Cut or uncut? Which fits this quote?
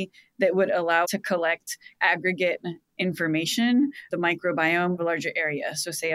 cut